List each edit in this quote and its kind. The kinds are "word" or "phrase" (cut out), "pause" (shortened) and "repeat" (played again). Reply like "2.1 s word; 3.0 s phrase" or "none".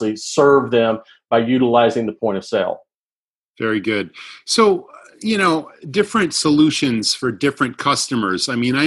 none